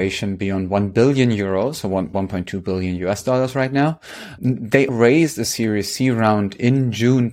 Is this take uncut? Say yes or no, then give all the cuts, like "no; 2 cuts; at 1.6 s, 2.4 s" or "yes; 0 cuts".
no; 3 cuts; at 2.1 s, 4.4 s, 4.9 s